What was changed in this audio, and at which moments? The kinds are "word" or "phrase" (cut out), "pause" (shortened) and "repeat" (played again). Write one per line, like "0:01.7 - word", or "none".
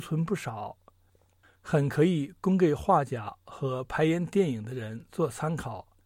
none